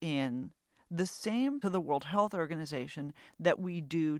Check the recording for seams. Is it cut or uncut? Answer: cut